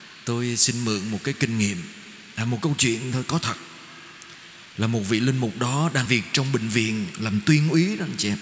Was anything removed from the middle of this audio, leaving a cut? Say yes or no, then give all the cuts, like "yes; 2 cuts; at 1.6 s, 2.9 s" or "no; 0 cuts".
yes; 1 cut; at 6.1 s